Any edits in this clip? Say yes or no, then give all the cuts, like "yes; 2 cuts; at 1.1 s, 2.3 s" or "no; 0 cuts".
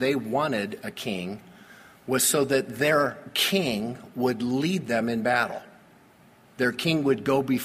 no; 0 cuts